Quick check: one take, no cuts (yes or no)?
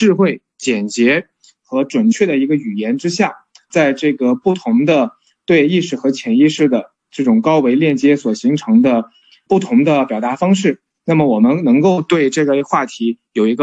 no